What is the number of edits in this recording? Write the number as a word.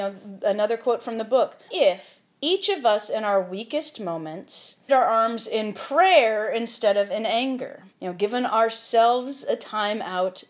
three